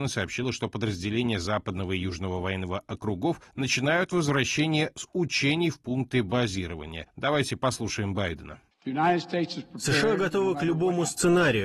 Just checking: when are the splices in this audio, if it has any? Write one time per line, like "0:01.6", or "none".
0:08.7